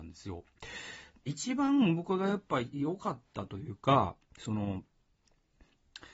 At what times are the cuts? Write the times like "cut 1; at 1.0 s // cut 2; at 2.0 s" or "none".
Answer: cut 1; at 1.3 s